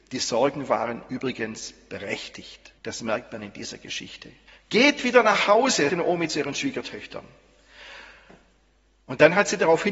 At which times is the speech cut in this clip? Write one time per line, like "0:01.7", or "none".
0:02.8
0:04.5
0:05.9